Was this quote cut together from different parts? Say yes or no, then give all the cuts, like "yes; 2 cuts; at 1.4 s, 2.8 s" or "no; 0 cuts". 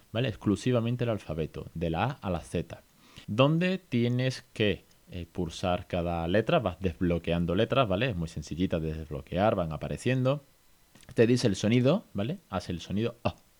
yes; 1 cut; at 3.2 s